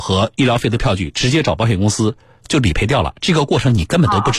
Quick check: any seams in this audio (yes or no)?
no